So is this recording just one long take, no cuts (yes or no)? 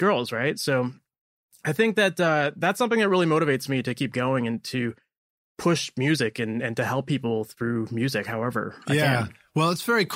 yes